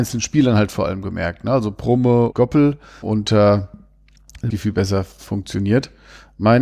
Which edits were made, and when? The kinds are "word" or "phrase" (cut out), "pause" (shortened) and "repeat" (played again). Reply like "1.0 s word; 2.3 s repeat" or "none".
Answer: 2.3 s word; 3.0 s word; 4.5 s phrase